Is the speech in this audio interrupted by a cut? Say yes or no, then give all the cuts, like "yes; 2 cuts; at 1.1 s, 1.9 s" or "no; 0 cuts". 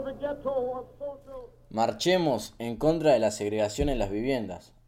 no; 0 cuts